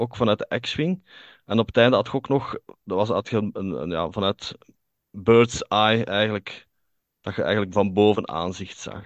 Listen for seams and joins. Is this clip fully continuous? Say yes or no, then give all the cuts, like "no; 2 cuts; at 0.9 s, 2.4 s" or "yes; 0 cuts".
yes; 0 cuts